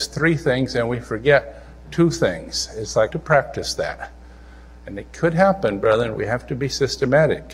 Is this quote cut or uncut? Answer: cut